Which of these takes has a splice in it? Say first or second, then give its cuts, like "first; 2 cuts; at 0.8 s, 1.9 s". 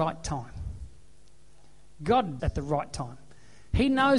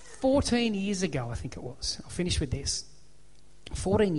first; 1 cut; at 2.4 s